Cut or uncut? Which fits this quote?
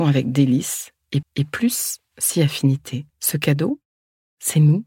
cut